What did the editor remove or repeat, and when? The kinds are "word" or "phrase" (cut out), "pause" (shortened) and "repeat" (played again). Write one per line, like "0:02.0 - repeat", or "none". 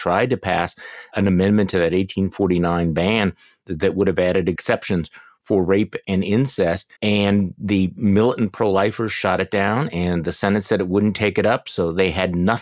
0:06.9 - pause